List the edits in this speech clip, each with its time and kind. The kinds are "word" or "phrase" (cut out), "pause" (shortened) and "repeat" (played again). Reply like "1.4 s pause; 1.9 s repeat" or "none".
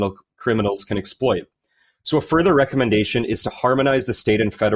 none